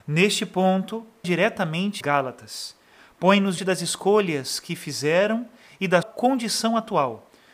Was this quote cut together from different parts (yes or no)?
yes